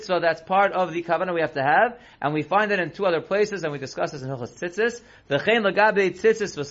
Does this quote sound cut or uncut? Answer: uncut